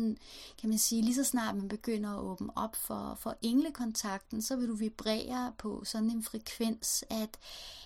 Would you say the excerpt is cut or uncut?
uncut